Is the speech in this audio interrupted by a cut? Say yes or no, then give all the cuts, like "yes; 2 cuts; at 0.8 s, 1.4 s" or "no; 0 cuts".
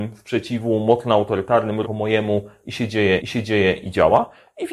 yes; 2 cuts; at 1.8 s, 3.2 s